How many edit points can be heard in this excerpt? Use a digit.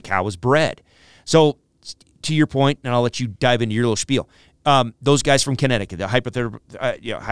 0